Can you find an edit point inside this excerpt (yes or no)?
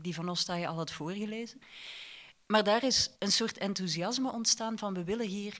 yes